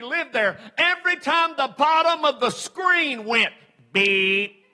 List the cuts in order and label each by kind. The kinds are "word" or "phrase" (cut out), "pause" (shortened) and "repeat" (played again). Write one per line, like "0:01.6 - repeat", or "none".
none